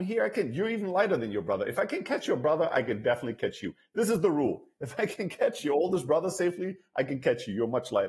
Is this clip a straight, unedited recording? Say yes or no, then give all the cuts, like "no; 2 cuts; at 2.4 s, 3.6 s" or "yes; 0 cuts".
yes; 0 cuts